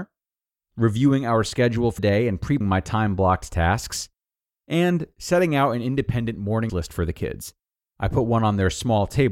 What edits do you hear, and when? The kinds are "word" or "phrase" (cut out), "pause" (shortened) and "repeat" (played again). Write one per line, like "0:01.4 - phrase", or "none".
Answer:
0:02.0 - word
0:02.6 - word
0:06.7 - word